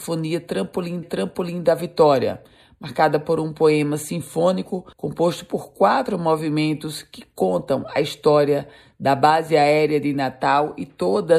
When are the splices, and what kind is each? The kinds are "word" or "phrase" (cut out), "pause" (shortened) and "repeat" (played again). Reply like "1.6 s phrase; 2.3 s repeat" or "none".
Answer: 1.0 s repeat; 4.9 s pause